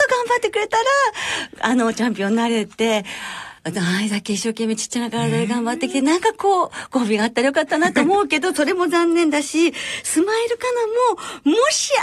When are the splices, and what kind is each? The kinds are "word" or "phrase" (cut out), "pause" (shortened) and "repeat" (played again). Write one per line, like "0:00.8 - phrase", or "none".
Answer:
0:03.6 - pause